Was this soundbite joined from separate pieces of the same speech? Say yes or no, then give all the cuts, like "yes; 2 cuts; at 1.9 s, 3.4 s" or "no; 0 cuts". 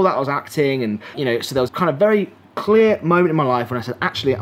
yes; 2 cuts; at 1.1 s, 1.7 s